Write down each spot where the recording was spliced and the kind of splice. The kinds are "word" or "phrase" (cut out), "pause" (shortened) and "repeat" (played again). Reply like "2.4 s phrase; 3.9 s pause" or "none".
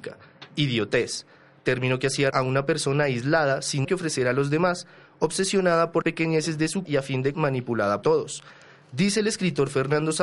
2.3 s word; 3.8 s word; 6.0 s word; 6.8 s word; 7.3 s word; 8.0 s word